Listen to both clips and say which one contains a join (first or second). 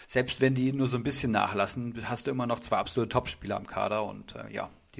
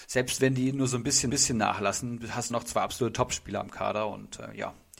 second